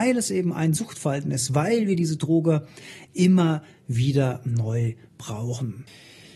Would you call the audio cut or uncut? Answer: uncut